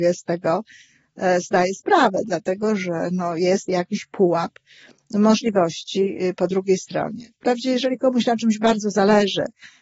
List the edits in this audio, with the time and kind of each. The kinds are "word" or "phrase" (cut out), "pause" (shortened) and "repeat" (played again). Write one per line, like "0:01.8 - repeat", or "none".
none